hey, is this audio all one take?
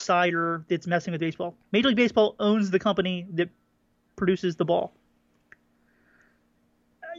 yes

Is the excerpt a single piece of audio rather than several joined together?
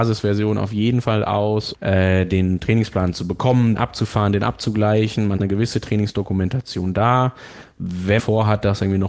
no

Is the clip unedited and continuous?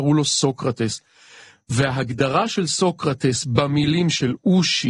yes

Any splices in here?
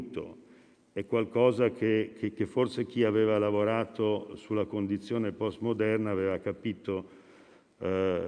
no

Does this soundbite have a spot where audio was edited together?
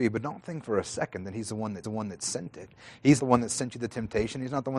yes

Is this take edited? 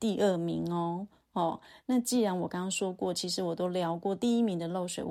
no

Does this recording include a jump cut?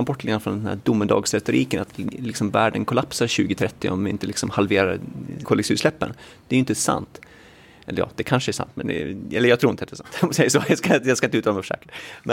no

